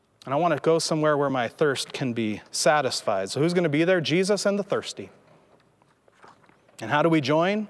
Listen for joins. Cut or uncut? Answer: uncut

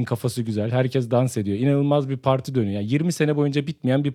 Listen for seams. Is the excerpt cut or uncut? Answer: uncut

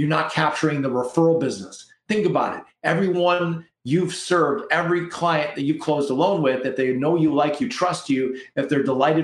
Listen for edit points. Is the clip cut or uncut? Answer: uncut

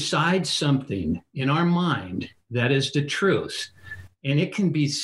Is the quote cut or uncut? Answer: uncut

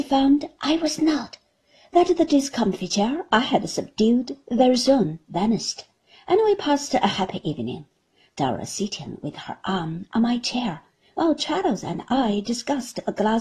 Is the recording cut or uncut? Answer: uncut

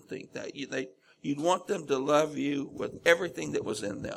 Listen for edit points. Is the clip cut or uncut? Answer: uncut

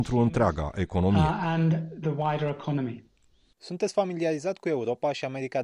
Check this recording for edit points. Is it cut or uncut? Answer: uncut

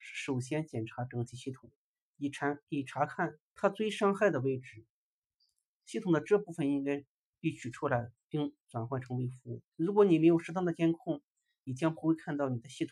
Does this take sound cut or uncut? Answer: cut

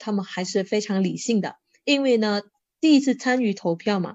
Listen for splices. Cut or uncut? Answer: uncut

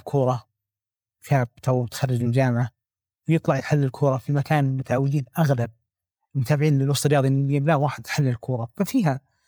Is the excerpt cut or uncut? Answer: uncut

